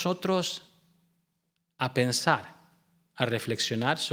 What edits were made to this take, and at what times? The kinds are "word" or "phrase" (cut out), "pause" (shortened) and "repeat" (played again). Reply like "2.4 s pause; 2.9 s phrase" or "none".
none